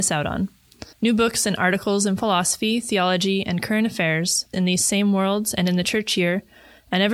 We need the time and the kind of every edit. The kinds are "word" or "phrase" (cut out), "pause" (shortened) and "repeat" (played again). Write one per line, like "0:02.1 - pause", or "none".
0:00.9 - pause
0:04.5 - phrase